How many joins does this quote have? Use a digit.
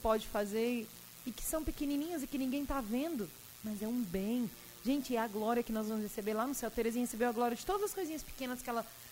0